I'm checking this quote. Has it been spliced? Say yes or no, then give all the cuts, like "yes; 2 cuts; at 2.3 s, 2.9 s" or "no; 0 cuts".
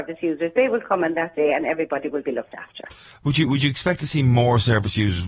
no; 0 cuts